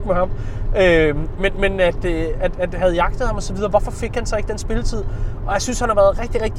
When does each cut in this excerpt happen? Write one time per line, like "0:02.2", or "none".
none